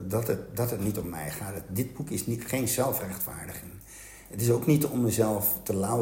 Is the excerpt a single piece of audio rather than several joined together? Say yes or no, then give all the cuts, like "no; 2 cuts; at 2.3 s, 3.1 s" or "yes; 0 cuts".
yes; 0 cuts